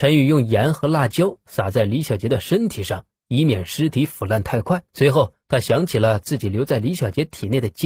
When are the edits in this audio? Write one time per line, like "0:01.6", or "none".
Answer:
0:04.9